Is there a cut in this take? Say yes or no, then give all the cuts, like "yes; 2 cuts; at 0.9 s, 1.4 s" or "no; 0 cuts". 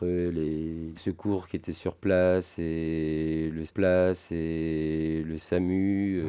yes; 2 cuts; at 1.0 s, 3.7 s